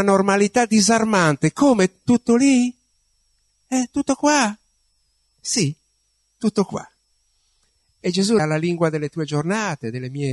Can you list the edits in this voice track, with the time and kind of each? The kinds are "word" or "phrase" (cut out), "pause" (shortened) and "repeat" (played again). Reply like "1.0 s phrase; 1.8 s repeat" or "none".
3.9 s word; 8.4 s word